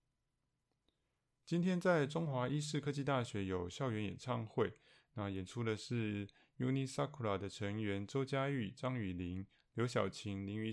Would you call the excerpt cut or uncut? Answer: uncut